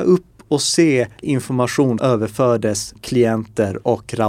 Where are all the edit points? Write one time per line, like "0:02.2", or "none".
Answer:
0:01.2
0:02.0
0:03.0